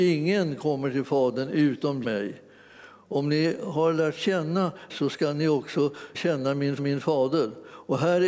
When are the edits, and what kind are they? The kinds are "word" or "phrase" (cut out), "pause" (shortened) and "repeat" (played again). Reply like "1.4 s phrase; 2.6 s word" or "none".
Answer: 2.0 s word; 4.9 s word; 6.1 s word; 6.8 s repeat